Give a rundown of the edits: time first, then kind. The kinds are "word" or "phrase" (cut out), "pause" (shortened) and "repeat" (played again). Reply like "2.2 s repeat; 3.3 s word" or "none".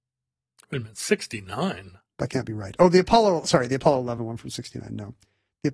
none